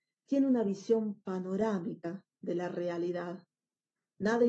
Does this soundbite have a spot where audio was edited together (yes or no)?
yes